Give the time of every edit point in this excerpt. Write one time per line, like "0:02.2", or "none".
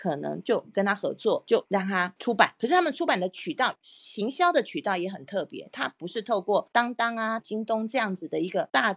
0:07.4